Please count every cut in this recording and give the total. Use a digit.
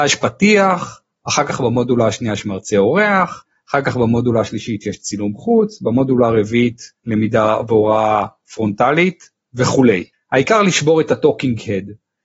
2